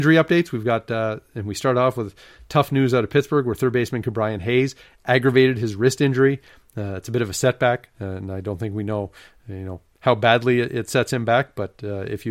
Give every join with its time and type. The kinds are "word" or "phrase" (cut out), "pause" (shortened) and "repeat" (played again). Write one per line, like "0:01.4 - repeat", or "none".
none